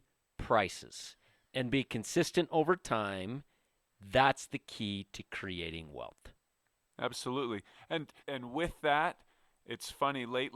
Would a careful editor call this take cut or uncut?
cut